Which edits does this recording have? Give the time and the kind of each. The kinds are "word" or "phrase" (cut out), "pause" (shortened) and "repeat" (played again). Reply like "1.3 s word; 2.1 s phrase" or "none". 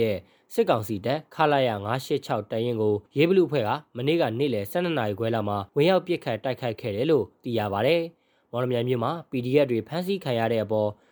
3.1 s pause; 5.7 s pause